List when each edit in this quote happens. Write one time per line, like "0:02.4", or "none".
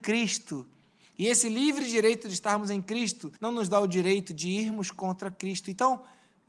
0:03.4